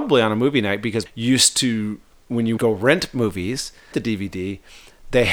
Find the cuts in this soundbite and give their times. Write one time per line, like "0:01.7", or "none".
0:01.1
0:02.6
0:03.9